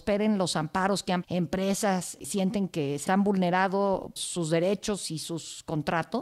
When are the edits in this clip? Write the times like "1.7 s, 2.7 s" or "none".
1.2 s, 2.2 s, 3.1 s, 4.2 s